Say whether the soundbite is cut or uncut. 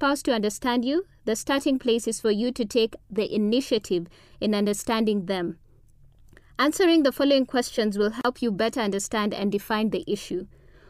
uncut